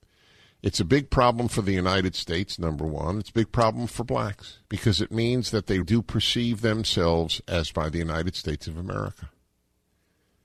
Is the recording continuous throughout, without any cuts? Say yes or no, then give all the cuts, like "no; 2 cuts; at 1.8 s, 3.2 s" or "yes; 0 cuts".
no; 3 cuts; at 4.6 s, 5.8 s, 7.7 s